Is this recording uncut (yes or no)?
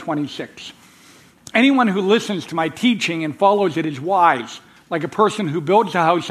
yes